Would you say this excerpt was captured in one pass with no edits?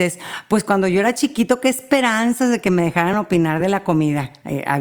yes; 0 cuts

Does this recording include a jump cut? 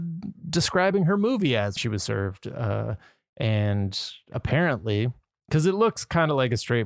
yes; 1 cut; at 1.8 s

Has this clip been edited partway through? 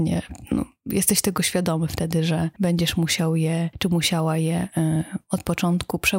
no; 0 cuts

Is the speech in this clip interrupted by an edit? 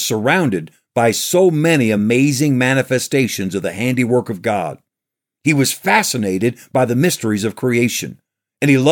no; 0 cuts

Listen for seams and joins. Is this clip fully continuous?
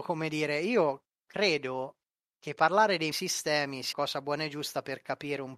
no; 2 cuts; at 3.1 s, 3.9 s

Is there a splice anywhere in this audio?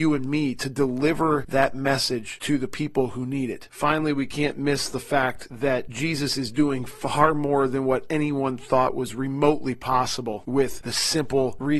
no; 0 cuts

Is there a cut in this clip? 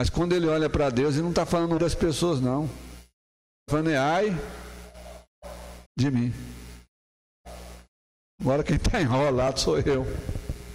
yes; 3 cuts; at 1.8 s, 3.7 s, 5.9 s

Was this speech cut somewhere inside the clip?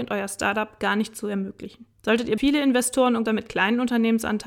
yes; 3 cuts; at 1.9 s, 2.4 s, 3.3 s

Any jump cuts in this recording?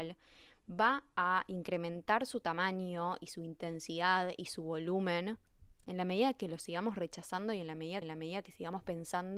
yes; 1 cut; at 8.0 s

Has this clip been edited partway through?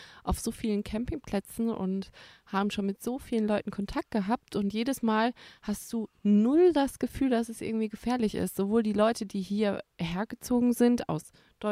no; 0 cuts

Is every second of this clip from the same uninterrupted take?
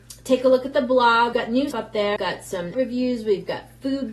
no; 4 cuts; at 1.3 s, 1.7 s, 2.2 s, 2.7 s

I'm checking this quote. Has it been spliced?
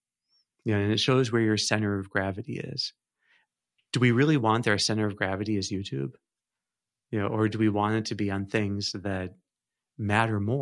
no; 0 cuts

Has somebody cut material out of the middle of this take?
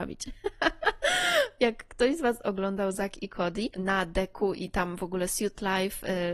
no; 0 cuts

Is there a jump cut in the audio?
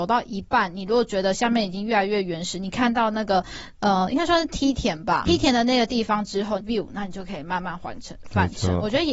yes; 2 cuts; at 5.3 s, 6.6 s

